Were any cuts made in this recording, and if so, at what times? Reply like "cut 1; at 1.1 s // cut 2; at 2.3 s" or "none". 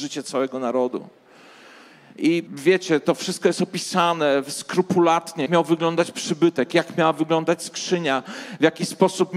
cut 1; at 2.5 s // cut 2; at 5.5 s